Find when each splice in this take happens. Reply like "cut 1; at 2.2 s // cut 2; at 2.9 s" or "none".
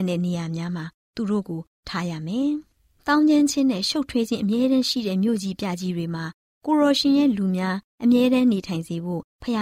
none

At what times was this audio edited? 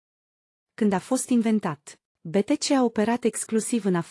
none

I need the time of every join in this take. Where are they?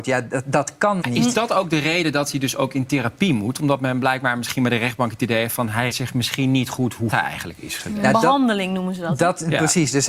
cut 1; at 1.0 s // cut 2; at 5.9 s // cut 3; at 7.1 s

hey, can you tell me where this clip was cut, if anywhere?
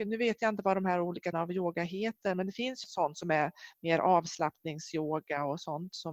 cut 1; at 1.3 s // cut 2; at 2.8 s

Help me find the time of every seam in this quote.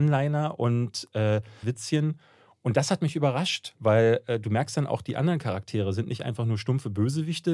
cut 1; at 1.6 s

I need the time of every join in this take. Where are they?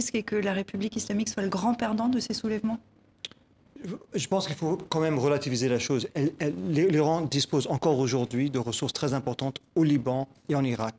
none

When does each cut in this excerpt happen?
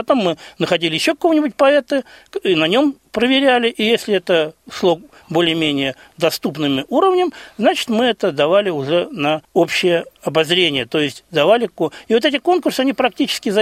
cut 1; at 4.6 s // cut 2; at 9.4 s

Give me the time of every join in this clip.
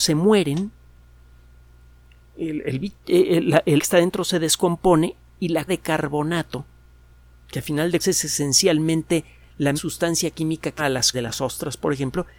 cut 1; at 3.8 s // cut 2; at 5.7 s // cut 3; at 8.0 s // cut 4; at 9.7 s // cut 5; at 10.8 s // cut 6; at 11.1 s

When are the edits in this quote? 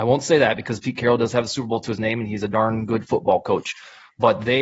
none

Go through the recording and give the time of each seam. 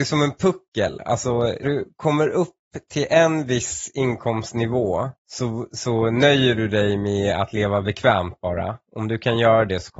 cut 1; at 1.6 s // cut 2; at 5.2 s

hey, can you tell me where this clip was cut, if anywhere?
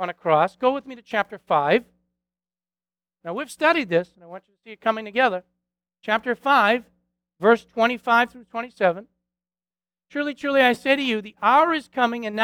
none

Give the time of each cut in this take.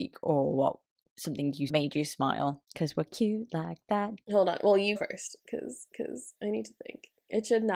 cut 1; at 1.7 s // cut 2; at 5.0 s // cut 3; at 5.9 s

